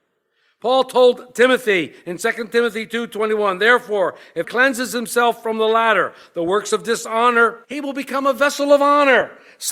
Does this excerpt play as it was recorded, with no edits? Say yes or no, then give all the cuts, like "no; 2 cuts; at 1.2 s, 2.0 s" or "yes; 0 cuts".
no; 2 cuts; at 4.4 s, 7.6 s